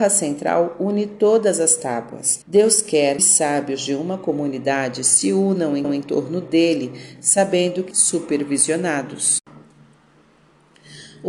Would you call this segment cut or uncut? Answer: cut